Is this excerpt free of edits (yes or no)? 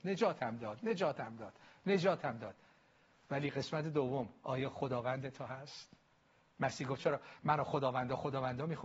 no